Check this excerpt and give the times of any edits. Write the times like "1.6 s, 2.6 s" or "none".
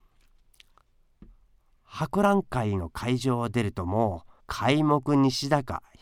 4.4 s